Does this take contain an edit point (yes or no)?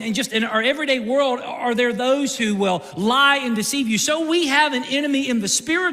no